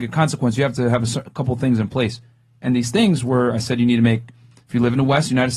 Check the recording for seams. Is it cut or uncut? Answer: uncut